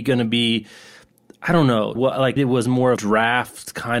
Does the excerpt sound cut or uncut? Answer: cut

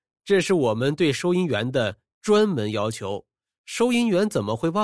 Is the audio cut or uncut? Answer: uncut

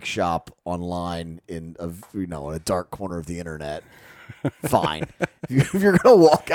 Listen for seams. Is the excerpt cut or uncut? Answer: uncut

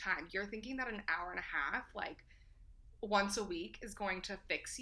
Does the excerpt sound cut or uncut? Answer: uncut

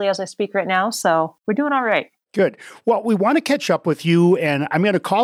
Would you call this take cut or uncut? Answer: uncut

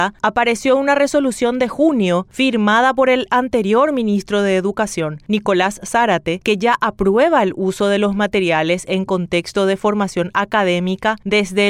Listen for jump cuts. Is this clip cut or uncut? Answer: uncut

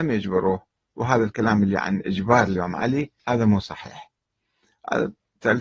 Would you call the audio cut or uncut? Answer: cut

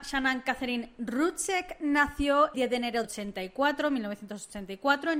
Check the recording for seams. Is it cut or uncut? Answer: cut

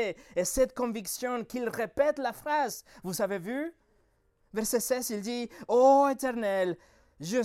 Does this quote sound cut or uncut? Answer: uncut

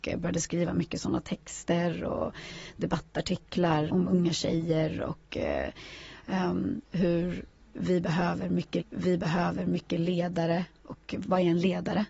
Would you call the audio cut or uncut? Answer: cut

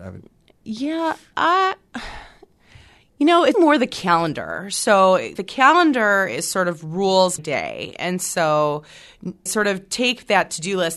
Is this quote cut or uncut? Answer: cut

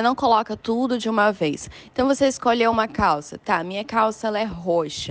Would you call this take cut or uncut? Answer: uncut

